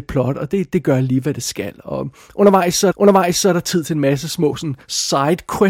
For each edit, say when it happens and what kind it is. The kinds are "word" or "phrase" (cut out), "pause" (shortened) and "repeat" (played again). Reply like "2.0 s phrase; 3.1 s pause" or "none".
2.9 s repeat